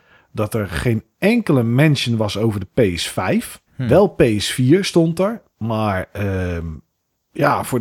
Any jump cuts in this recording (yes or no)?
yes